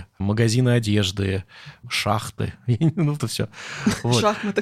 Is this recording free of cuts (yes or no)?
no